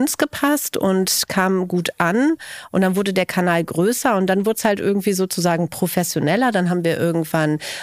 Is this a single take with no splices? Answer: yes; 0 cuts

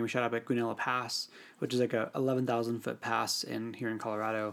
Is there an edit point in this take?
no; 0 cuts

